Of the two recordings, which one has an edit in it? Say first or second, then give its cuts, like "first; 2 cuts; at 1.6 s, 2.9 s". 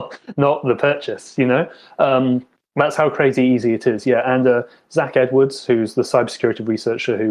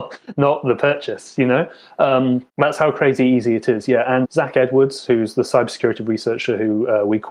second; 2 cuts; at 2.5 s, 4.2 s